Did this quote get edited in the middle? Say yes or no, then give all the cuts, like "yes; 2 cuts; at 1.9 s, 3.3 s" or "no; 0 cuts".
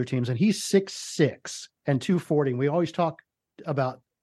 yes; 1 cut; at 1.8 s